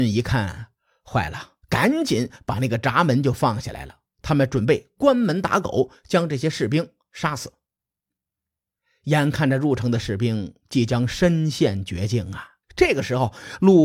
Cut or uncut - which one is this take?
cut